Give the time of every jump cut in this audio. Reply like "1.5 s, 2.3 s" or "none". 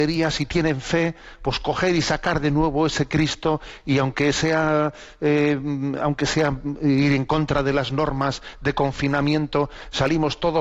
none